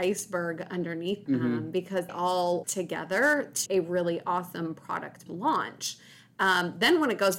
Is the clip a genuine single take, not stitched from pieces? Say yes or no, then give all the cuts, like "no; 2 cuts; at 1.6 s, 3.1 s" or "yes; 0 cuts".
no; 5 cuts; at 1.3 s, 2.1 s, 2.6 s, 3.7 s, 5.3 s